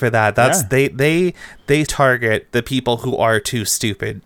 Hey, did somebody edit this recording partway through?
yes; 1 cut; at 1.9 s

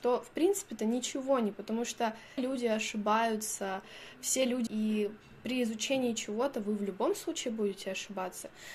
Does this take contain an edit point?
yes; 3 cuts; at 1.5 s, 2.4 s, 4.7 s

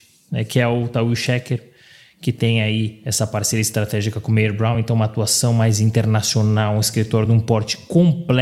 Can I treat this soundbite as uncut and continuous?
yes; 0 cuts

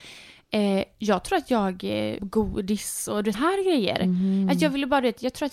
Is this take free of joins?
no; 2 cuts; at 2.2 s, 3.3 s

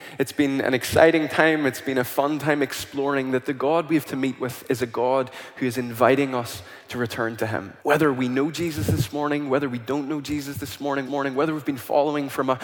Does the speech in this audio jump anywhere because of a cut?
yes; 3 cuts; at 4.1 s, 7.8 s, 11.1 s

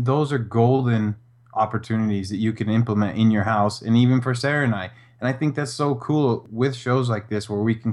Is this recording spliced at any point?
no; 0 cuts

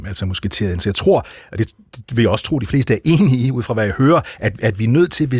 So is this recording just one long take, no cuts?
yes; 0 cuts

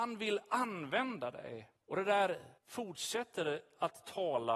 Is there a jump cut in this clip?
yes; 2 cuts; at 1.8 s, 2.6 s

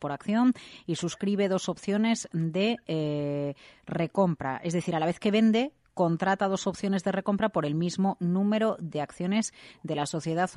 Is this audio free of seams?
yes; 0 cuts

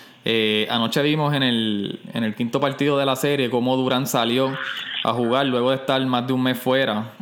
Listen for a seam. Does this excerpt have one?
no; 0 cuts

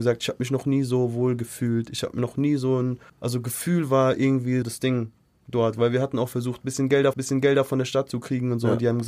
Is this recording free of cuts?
no; 3 cuts; at 3.1 s, 4.6 s, 7.1 s

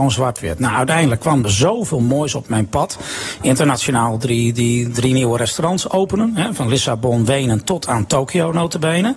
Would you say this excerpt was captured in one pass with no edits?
no; 1 cut; at 1.4 s

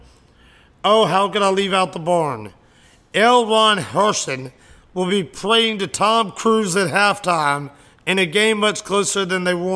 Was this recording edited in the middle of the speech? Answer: no; 0 cuts

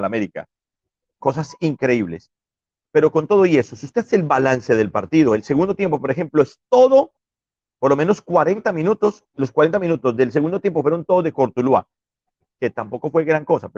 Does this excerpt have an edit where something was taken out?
yes; 1 cut; at 9.3 s

